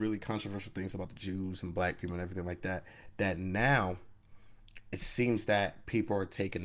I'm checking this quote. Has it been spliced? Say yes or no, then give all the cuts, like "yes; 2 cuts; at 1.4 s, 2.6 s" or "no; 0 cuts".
no; 0 cuts